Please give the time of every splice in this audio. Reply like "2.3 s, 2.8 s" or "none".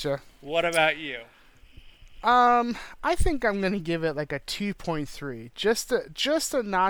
none